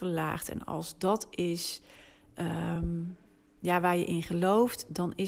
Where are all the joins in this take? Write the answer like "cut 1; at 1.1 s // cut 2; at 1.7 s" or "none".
none